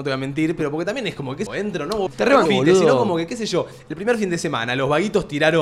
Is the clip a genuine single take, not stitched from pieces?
no; 3 cuts; at 1.5 s, 2.1 s, 2.5 s

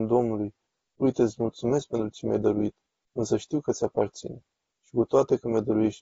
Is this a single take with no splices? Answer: yes; 0 cuts

